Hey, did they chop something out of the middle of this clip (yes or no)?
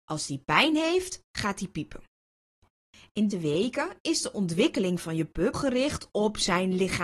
yes